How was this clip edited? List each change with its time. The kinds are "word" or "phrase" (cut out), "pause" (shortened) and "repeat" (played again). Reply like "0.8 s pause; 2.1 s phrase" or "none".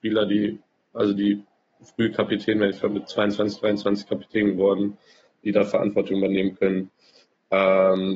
none